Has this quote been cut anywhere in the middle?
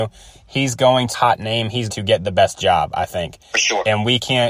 yes; 2 cuts; at 1.1 s, 1.9 s

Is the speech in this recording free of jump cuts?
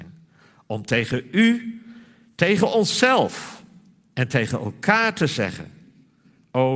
yes; 0 cuts

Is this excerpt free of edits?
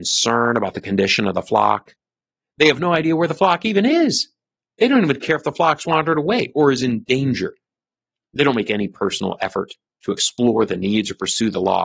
yes; 0 cuts

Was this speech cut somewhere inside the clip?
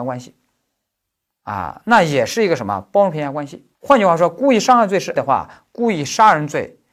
yes; 2 cuts; at 3.7 s, 5.2 s

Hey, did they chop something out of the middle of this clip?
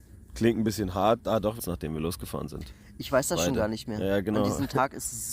yes; 2 cuts; at 1.2 s, 1.6 s

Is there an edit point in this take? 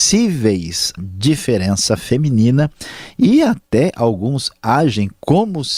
yes; 1 cut; at 1.0 s

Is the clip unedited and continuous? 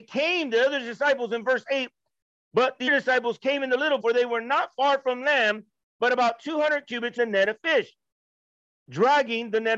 no; 3 cuts; at 2.9 s, 4.0 s, 7.2 s

